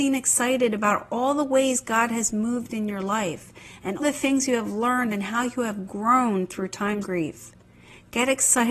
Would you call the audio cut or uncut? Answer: cut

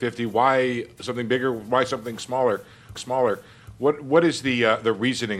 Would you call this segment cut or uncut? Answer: cut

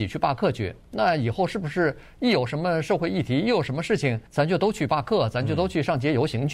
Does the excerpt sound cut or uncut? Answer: cut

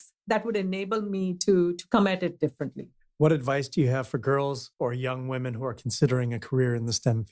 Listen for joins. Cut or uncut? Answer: uncut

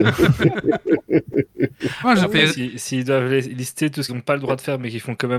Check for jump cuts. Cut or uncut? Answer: cut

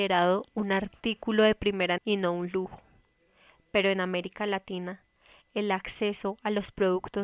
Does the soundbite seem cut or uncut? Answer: cut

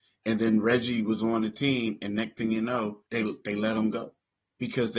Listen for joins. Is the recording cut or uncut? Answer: cut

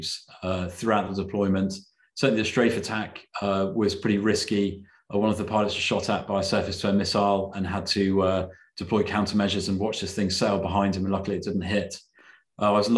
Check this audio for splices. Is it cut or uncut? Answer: uncut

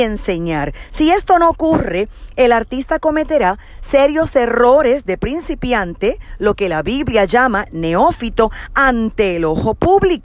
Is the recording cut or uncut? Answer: uncut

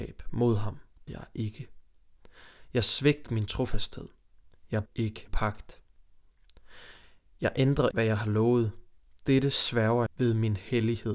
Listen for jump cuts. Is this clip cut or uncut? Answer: cut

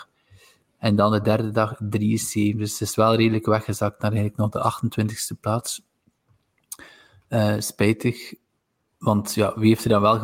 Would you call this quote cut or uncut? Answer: uncut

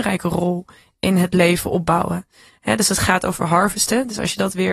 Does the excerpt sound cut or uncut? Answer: uncut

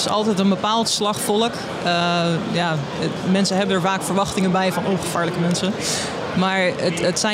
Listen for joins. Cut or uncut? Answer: uncut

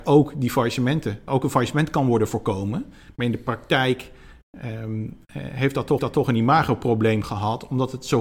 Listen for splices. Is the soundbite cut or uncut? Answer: cut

